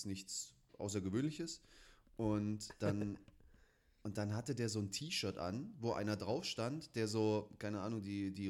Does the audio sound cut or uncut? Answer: uncut